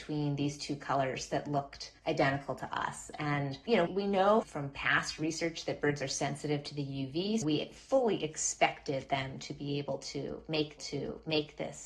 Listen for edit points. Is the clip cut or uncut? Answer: cut